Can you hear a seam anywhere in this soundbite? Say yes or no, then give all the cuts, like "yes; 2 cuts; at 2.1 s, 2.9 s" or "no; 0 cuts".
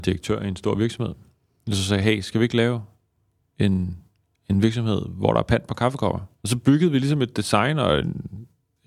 no; 0 cuts